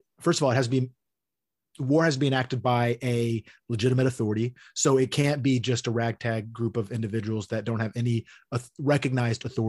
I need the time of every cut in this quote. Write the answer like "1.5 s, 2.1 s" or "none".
none